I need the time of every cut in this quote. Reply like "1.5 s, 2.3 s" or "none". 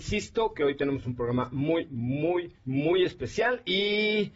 1.9 s, 2.6 s

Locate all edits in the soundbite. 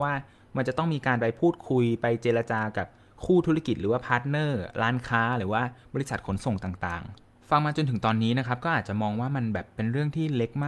none

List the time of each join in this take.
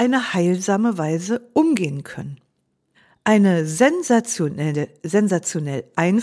2.9 s

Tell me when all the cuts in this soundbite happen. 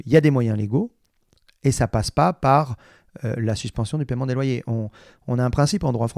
none

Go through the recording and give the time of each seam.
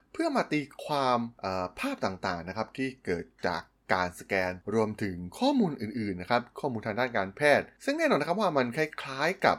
none

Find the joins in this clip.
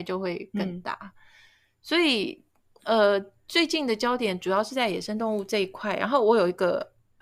none

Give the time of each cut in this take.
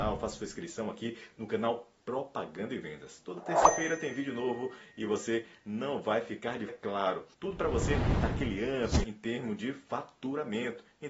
6.7 s, 7.3 s, 9.0 s

